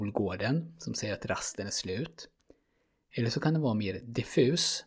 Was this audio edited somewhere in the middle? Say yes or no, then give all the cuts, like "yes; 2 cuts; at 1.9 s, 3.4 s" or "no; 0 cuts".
no; 0 cuts